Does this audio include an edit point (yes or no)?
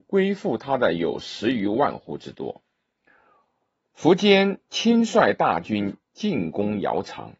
no